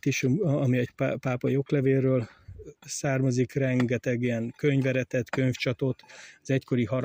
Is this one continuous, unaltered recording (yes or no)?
yes